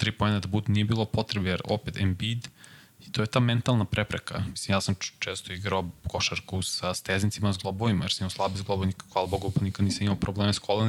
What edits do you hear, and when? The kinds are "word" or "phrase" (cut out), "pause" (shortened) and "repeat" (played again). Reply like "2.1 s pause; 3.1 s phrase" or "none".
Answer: none